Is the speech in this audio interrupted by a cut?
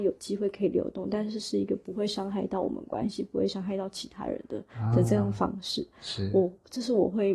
yes; 1 cut; at 4.7 s

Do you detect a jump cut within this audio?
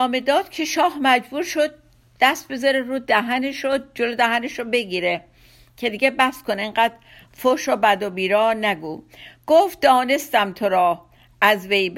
no; 0 cuts

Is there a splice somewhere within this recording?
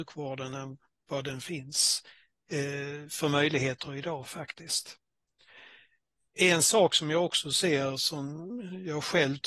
no; 0 cuts

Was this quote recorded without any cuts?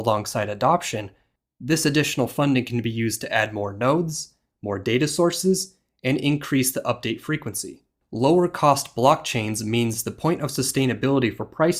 yes; 0 cuts

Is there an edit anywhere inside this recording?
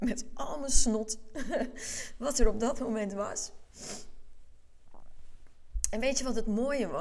no; 0 cuts

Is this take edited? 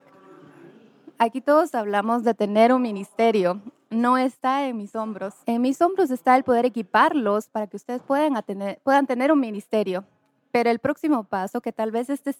yes; 1 cut; at 5.4 s

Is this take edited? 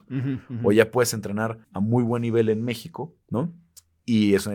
yes; 2 cuts; at 1.6 s, 3.2 s

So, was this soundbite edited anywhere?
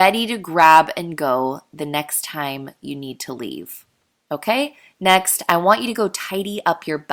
no; 0 cuts

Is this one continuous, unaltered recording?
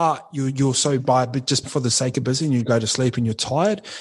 no; 3 cuts; at 1.0 s, 1.6 s, 2.2 s

